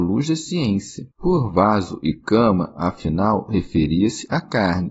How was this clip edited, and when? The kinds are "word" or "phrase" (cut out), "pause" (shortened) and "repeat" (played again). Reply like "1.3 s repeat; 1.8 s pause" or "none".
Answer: 1.1 s pause